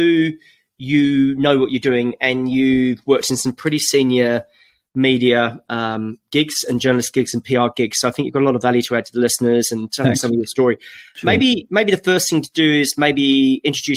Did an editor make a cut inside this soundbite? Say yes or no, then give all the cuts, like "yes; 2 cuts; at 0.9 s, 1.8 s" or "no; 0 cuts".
no; 0 cuts